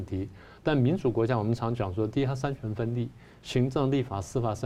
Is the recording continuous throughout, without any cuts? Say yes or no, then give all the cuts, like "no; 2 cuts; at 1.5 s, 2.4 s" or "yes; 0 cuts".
yes; 0 cuts